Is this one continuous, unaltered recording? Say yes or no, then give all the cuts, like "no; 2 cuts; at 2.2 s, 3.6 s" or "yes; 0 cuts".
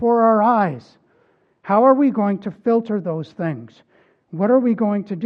yes; 0 cuts